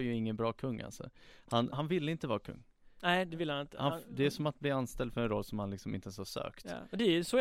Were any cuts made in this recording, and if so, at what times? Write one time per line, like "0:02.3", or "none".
0:01.7